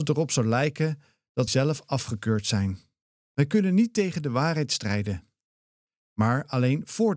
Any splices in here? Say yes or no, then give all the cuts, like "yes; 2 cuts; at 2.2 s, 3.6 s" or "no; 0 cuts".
yes; 2 cuts; at 1.5 s, 3.0 s